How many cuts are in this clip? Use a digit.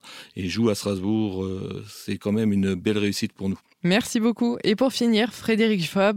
0